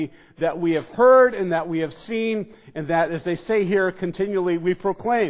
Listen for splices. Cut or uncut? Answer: uncut